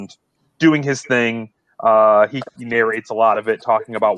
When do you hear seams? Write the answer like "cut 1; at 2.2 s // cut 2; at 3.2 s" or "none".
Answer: none